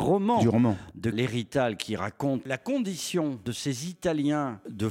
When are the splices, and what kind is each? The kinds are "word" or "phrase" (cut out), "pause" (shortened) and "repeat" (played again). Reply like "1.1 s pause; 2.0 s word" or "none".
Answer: 1.1 s word